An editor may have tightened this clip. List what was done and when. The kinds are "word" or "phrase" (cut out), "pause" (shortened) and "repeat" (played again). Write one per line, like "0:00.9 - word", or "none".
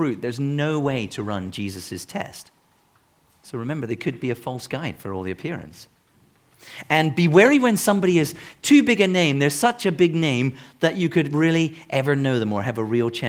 none